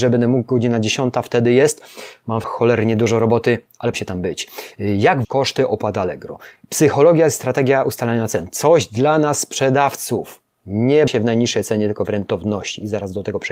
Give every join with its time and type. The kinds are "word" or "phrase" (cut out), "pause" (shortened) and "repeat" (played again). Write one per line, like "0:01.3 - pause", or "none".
0:02.4 - word
0:03.9 - word
0:05.2 - word
0:11.1 - word